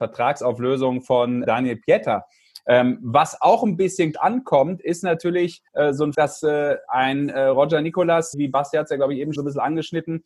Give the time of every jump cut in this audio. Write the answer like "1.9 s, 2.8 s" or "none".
1.4 s, 4.1 s, 5.7 s, 6.1 s, 8.3 s, 9.4 s